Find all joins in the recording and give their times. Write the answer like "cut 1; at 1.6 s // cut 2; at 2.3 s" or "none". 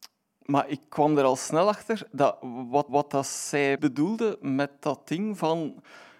cut 1; at 2.9 s // cut 2; at 3.8 s